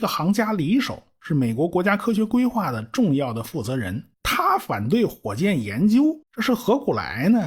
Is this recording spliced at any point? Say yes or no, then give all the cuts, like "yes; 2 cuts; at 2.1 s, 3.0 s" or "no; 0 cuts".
yes; 2 cuts; at 4.1 s, 6.2 s